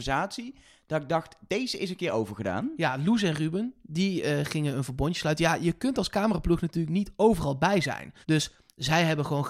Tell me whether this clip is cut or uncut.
cut